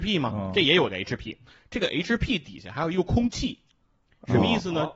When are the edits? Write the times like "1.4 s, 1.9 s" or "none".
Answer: none